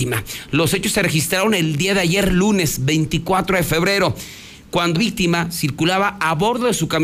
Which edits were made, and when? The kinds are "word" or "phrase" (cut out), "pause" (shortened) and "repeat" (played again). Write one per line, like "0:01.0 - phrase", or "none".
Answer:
0:05.0 - word